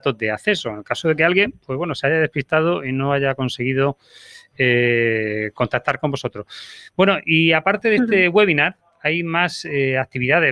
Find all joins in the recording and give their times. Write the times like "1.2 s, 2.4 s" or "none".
none